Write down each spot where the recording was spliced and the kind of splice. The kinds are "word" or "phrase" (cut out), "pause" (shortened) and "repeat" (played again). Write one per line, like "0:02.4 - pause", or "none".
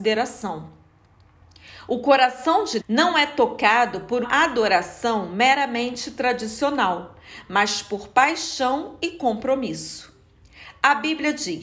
0:02.8 - word
0:04.2 - word